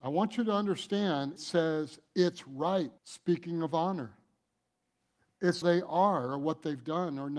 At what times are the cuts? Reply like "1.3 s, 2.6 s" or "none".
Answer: 1.4 s, 3.0 s, 5.6 s